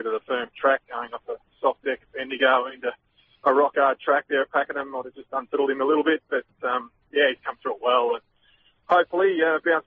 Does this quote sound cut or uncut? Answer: uncut